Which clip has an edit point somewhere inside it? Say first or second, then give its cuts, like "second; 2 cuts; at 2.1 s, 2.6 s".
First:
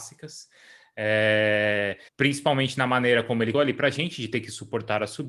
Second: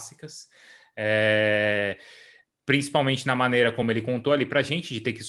first; 2 cuts; at 2.1 s, 3.5 s